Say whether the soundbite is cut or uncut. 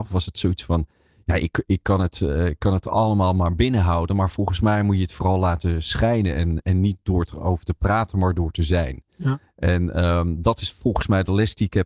uncut